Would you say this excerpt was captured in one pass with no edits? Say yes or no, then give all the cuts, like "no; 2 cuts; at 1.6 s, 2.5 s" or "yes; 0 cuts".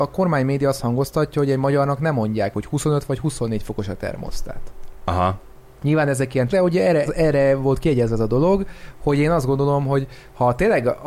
no; 4 cuts; at 2.5 s, 5.6 s, 6.5 s, 7.1 s